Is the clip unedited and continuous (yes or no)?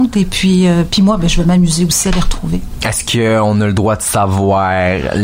yes